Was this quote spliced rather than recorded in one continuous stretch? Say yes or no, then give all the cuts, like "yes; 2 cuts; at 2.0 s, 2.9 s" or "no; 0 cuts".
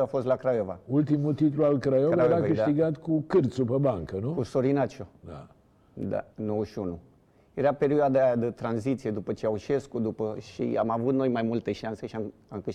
yes; 2 cuts; at 5.1 s, 6.3 s